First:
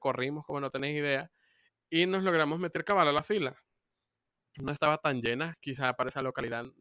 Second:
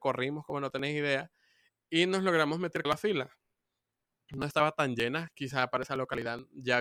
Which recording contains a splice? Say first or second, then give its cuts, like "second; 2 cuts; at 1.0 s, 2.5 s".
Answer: second; 1 cut; at 2.8 s